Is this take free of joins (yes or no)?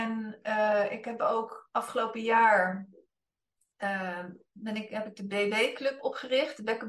yes